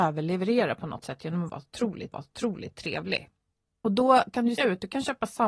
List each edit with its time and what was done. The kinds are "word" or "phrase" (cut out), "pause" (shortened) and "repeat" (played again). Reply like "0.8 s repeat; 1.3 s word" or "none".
2.1 s repeat; 4.6 s word